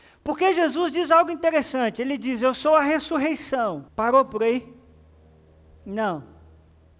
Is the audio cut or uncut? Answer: cut